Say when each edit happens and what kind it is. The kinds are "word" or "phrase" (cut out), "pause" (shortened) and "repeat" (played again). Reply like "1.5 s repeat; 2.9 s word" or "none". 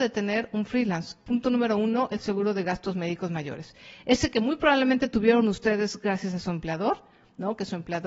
none